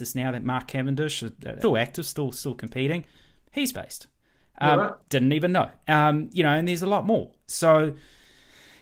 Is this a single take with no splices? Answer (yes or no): no